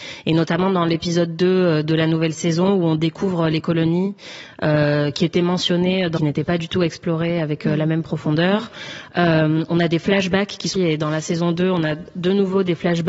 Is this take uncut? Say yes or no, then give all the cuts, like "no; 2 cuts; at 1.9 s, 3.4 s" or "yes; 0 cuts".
no; 2 cuts; at 6.2 s, 10.8 s